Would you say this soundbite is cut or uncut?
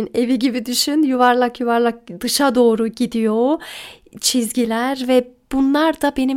uncut